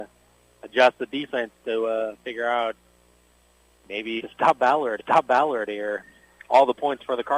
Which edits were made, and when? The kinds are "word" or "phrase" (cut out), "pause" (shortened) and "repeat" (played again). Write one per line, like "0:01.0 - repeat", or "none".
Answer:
0:04.2 - word
0:05.0 - repeat

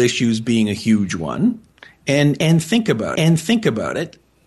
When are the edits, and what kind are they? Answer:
0:03.2 - repeat

